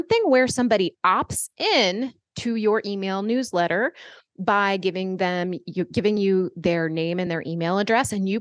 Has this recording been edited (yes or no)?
no